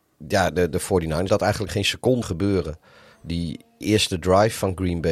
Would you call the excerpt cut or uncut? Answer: cut